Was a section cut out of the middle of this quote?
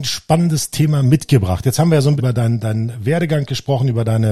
yes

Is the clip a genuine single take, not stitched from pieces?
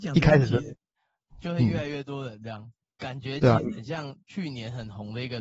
yes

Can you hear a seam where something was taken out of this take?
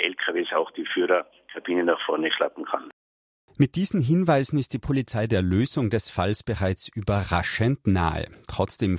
no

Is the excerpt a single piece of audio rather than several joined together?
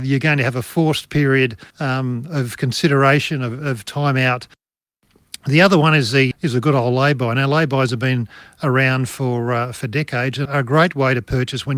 no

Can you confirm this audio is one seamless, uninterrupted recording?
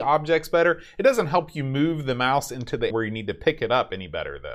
no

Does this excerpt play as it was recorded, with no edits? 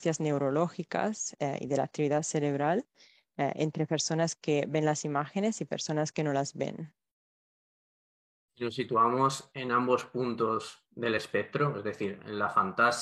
yes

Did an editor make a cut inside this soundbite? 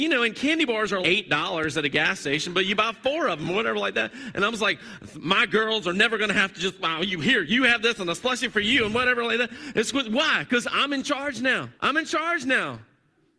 yes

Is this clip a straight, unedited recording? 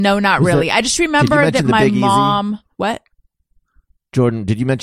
no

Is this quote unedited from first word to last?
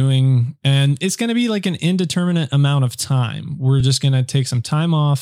yes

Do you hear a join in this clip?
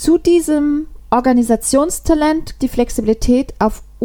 yes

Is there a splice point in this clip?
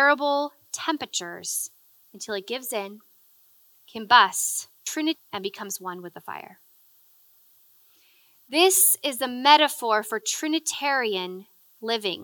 no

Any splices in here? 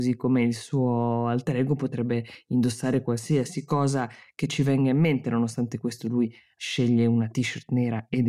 no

